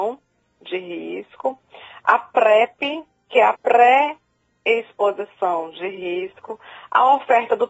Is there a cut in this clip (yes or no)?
yes